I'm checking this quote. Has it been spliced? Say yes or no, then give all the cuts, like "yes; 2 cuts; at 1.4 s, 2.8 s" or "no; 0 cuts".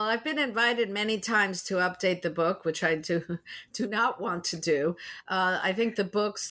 no; 0 cuts